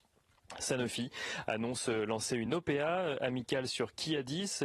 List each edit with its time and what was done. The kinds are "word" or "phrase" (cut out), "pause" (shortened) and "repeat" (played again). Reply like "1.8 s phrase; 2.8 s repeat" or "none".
none